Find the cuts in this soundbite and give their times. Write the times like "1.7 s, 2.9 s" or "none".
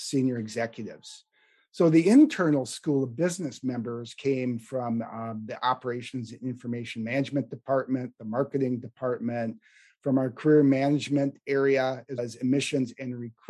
12.2 s